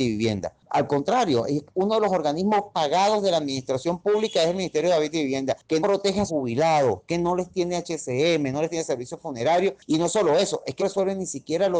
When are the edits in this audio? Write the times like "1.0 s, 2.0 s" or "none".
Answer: 2.7 s, 5.8 s, 6.3 s, 10.8 s